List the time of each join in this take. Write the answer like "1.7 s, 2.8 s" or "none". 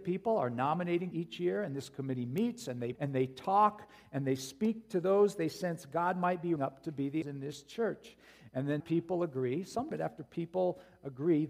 1.1 s, 2.9 s, 6.6 s, 7.2 s, 8.8 s, 9.9 s